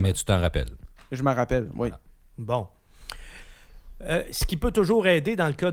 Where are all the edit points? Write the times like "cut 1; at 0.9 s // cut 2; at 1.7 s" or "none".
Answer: none

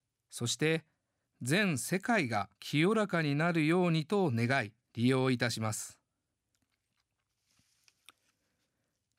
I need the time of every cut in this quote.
cut 1; at 2.6 s // cut 2; at 4.9 s

